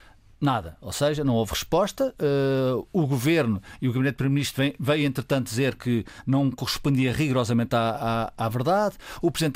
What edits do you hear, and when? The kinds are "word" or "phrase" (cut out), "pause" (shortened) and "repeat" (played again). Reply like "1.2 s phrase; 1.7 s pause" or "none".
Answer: none